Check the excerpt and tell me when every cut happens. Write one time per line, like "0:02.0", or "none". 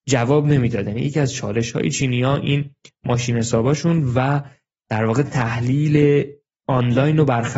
none